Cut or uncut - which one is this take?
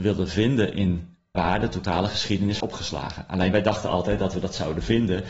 cut